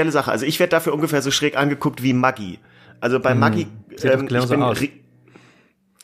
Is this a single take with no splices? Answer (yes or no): yes